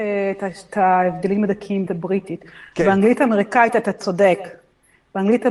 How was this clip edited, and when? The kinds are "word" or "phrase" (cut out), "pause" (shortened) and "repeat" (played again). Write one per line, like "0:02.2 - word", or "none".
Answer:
0:01.9 - phrase